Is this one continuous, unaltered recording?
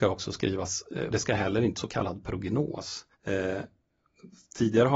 no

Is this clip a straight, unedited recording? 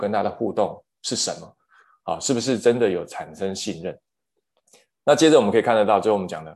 yes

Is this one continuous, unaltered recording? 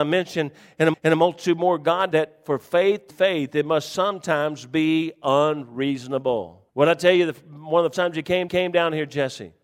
no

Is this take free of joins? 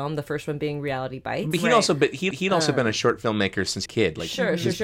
no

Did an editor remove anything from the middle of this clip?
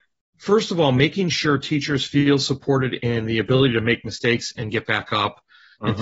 no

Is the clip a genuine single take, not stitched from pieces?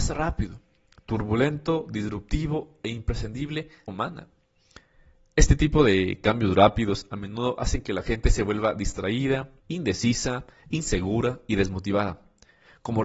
no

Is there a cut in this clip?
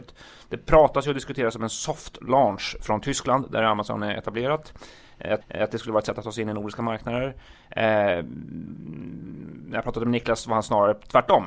yes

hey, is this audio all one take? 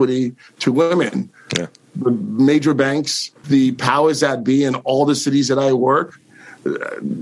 no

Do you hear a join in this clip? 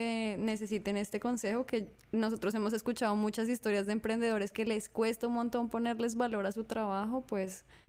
no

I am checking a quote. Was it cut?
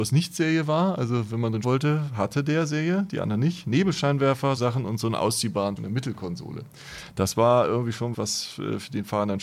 yes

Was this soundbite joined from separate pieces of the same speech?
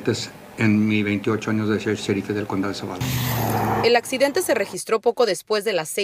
no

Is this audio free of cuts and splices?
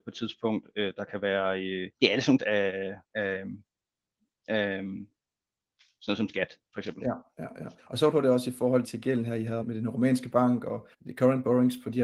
no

